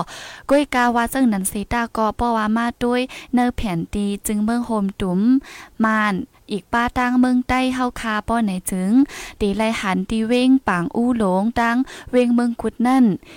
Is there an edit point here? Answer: yes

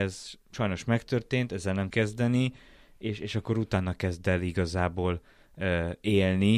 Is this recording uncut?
no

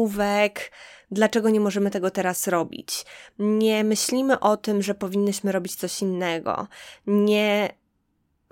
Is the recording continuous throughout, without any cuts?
no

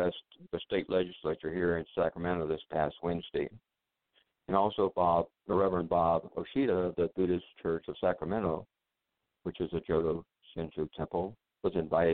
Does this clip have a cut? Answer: no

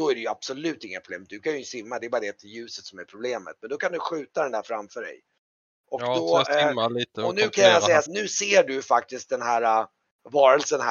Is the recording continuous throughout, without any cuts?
no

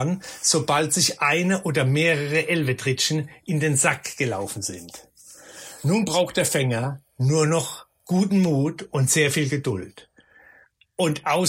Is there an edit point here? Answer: no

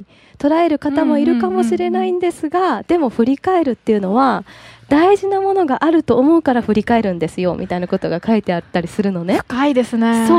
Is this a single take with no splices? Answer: yes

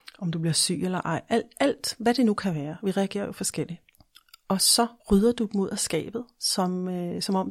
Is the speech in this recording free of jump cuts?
no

